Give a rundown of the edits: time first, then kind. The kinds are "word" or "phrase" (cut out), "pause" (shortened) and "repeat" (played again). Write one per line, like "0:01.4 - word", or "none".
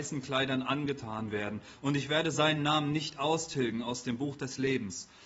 none

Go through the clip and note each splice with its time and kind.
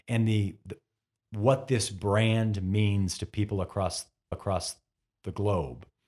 0:04.3 - repeat

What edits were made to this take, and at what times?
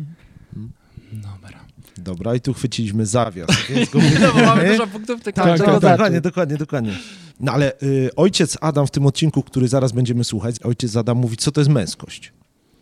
0:01.9 - pause
0:07.3 - pause

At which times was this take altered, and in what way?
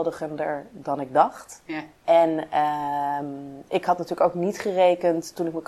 none

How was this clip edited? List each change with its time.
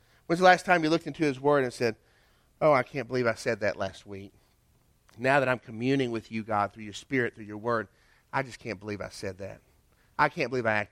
none

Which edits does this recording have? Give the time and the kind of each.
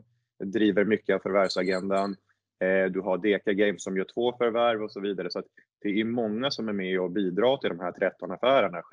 none

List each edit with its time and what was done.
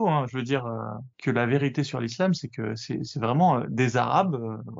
0:01.1 - pause

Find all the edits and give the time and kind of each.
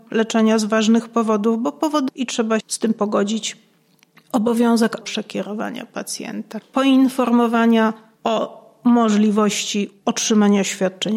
0:02.1 - word
0:02.6 - word
0:05.0 - word
0:06.6 - word

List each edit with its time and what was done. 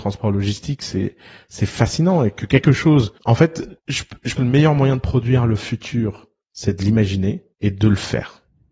0:03.2 - pause
0:03.8 - pause
0:04.4 - word
0:07.5 - pause

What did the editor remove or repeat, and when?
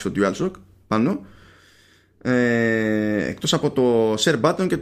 none

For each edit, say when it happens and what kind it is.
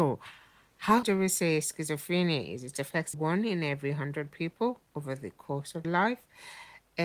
0:01.0 - word
0:03.1 - word
0:05.8 - word

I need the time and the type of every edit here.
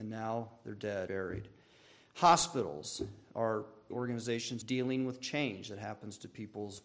0:01.1 - word
0:03.9 - word
0:04.6 - word

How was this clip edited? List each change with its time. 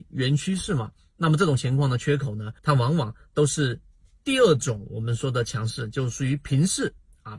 0:02.6 - pause

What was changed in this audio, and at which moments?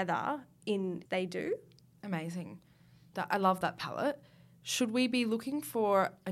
0:01.1 - word

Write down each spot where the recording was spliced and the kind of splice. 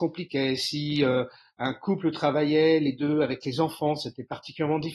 none

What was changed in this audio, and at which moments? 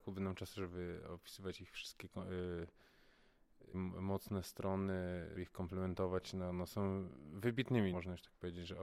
0:03.7 - word
0:05.4 - word
0:07.9 - phrase

